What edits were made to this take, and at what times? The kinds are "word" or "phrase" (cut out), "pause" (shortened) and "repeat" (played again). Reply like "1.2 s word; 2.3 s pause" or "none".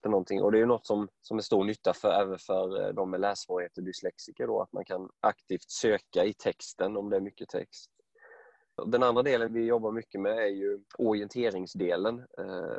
1.2 s pause; 5.1 s pause; 9.5 s word; 10.9 s pause

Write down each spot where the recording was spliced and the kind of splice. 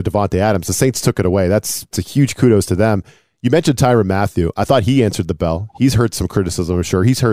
1.9 s word

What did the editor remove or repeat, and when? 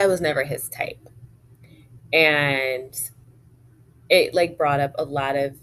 none

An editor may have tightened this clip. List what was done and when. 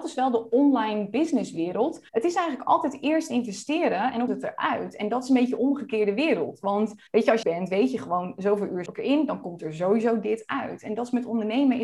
2.1 s pause; 4.3 s phrase; 7.1 s pause; 7.4 s phrase; 8.9 s word

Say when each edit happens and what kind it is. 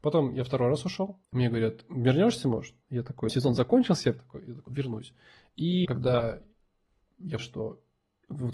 1.2 s pause; 2.8 s pause; 3.3 s word; 4.2 s phrase; 4.7 s word; 5.8 s word; 7.4 s word

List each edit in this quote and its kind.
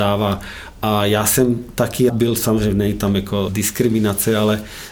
2.1 s word; 3.5 s word

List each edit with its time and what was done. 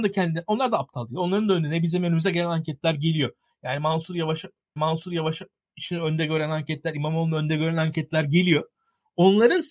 4.8 s repeat

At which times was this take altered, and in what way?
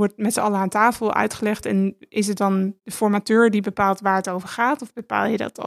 none

